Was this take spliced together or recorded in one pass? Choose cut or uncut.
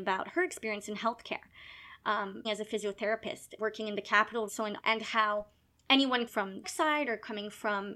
cut